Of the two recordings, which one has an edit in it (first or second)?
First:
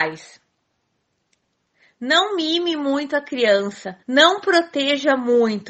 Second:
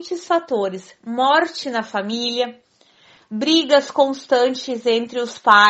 first